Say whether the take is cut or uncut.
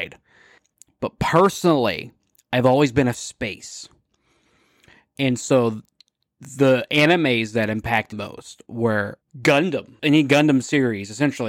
cut